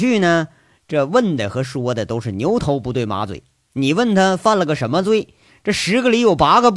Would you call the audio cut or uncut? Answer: uncut